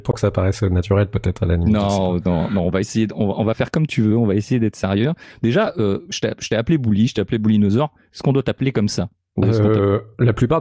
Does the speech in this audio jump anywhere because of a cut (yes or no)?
no